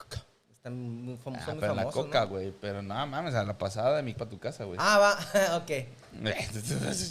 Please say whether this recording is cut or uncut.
cut